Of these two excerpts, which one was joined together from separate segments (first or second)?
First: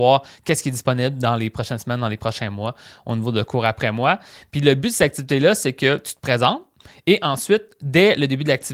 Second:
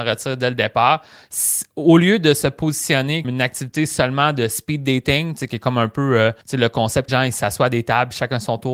second